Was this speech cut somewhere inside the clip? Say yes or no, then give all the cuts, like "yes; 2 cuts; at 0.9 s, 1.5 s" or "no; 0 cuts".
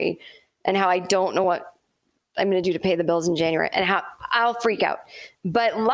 no; 0 cuts